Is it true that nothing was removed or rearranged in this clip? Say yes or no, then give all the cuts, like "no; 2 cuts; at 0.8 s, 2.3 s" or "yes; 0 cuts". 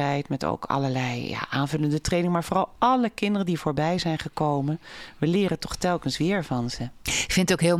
yes; 0 cuts